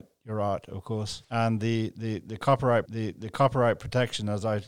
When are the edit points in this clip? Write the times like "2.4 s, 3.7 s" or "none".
1.2 s, 2.9 s